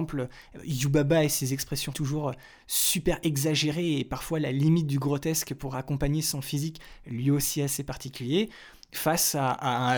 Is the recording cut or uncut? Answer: cut